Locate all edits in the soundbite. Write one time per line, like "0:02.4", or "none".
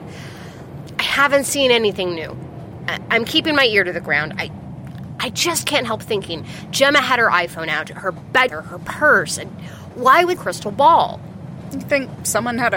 0:08.5
0:10.4